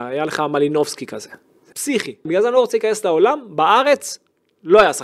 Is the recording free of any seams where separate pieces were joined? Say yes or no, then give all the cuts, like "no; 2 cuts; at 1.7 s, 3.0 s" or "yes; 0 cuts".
no; 2 cuts; at 1.7 s, 2.3 s